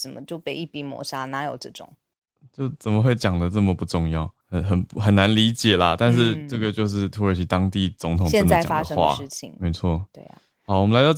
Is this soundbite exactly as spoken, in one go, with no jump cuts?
no; 1 cut; at 4.4 s

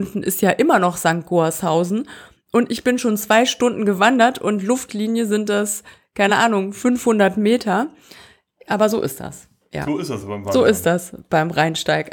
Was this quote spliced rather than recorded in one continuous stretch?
no; 0 cuts

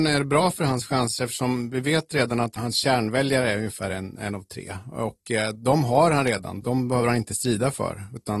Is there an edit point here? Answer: no; 0 cuts

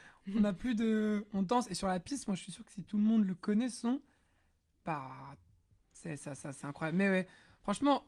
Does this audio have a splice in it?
no; 0 cuts

